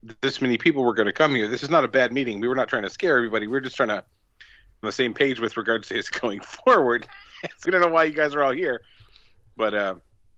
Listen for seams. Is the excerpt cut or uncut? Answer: cut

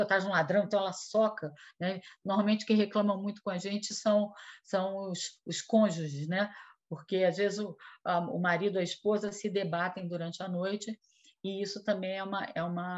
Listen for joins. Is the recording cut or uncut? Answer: uncut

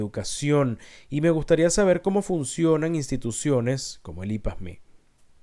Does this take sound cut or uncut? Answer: uncut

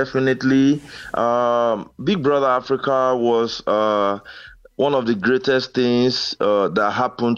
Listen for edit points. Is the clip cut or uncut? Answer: uncut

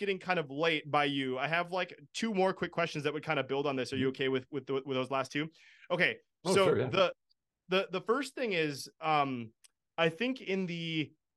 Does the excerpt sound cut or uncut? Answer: uncut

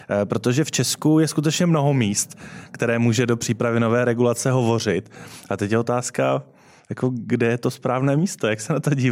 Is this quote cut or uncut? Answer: uncut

